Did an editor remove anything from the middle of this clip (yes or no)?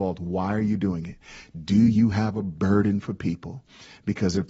no